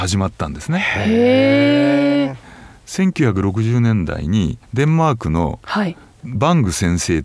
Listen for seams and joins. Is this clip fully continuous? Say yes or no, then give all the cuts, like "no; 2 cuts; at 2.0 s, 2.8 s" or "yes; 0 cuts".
no; 1 cut; at 4.6 s